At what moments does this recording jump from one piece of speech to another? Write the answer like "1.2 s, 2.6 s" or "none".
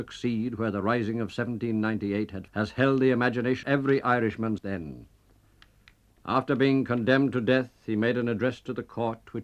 2.5 s, 3.6 s, 4.6 s